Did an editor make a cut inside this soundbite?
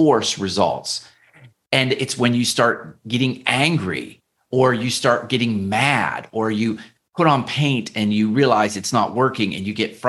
no; 0 cuts

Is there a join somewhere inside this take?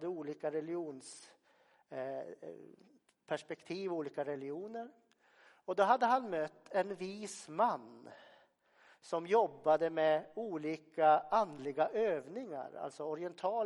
no; 0 cuts

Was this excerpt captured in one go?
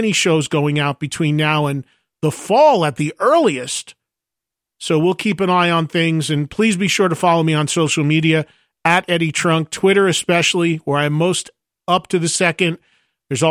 yes; 0 cuts

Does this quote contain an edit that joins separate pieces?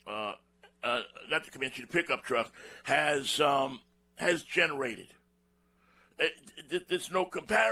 yes; 2 cuts; at 4.0 s, 5.4 s

